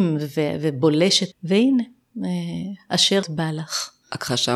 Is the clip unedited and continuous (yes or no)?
no